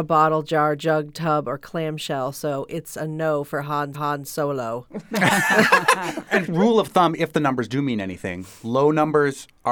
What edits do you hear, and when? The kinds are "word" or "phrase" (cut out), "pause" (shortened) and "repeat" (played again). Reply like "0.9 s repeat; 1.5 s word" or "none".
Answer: 3.9 s repeat; 6.5 s word